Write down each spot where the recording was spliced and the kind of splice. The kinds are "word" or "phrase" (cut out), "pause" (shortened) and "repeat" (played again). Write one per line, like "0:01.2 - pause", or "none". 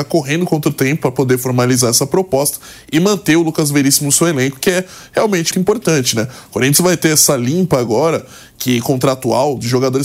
0:05.5 - word

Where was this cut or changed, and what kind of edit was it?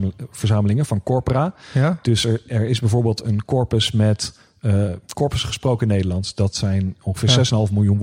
none

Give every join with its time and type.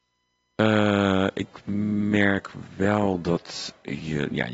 none

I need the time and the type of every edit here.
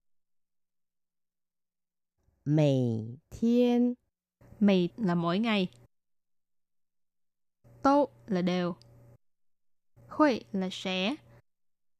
0:04.9 - word
0:07.6 - word
0:09.9 - word

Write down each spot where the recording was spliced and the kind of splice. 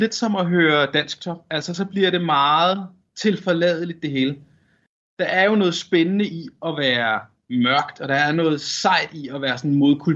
none

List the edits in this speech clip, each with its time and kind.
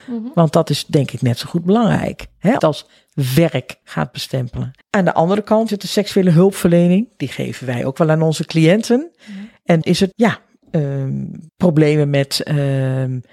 0:02.6 - phrase
0:03.8 - pause
0:04.8 - pause
0:05.7 - word
0:09.8 - word
0:10.1 - phrase
0:11.5 - pause

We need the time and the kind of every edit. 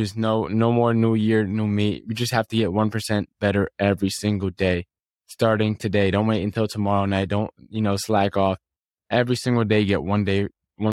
none

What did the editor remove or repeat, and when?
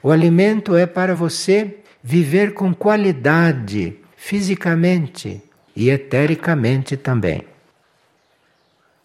none

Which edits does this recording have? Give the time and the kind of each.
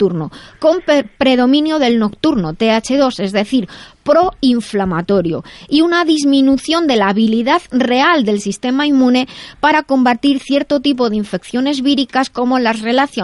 none

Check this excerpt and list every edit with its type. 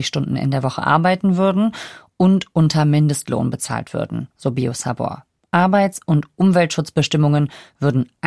none

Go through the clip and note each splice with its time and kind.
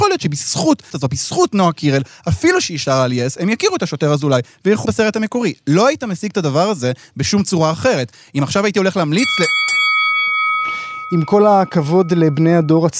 0:00.9 - word
0:04.9 - word

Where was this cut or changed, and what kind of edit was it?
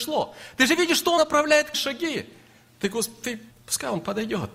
0:01.2 - word
0:01.7 - word
0:03.5 - word

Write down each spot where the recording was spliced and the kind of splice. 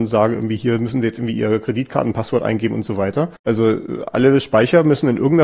0:03.4 - pause

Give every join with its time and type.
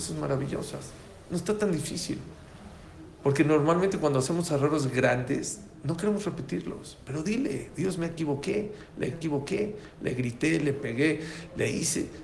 0:09.1 - repeat

